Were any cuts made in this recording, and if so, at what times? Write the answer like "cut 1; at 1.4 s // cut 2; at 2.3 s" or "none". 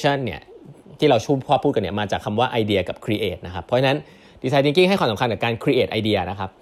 none